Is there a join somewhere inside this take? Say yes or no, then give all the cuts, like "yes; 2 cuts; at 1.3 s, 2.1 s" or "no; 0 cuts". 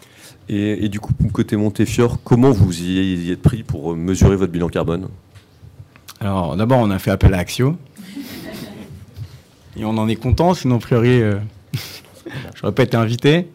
no; 0 cuts